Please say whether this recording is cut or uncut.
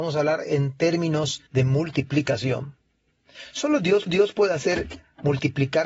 cut